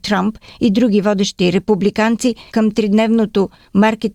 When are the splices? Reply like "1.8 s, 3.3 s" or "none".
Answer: 2.5 s